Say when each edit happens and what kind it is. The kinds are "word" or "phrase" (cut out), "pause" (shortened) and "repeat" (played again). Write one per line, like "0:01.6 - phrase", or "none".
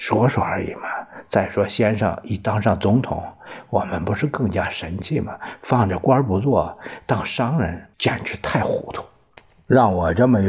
0:07.9 - pause